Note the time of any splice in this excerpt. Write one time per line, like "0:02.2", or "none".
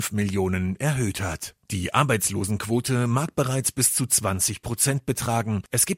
0:01.6